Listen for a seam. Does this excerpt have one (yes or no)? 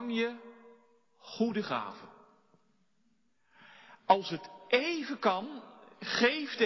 no